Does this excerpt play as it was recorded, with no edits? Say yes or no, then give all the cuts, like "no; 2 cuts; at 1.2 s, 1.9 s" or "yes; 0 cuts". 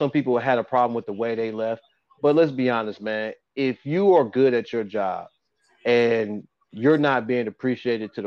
yes; 0 cuts